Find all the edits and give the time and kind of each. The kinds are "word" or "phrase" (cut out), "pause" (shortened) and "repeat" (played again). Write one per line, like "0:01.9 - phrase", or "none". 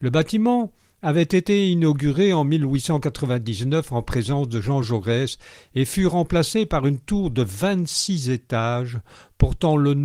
none